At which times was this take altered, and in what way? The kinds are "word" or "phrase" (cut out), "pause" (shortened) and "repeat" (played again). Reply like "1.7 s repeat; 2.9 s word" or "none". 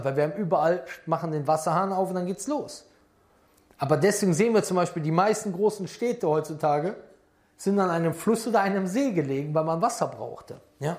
none